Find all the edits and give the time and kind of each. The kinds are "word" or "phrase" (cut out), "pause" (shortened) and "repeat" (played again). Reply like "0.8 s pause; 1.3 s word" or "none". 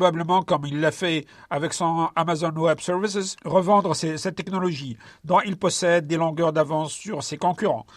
none